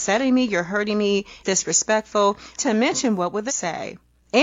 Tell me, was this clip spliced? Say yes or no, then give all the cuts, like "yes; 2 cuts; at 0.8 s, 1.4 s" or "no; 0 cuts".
yes; 3 cuts; at 1.4 s, 2.6 s, 3.5 s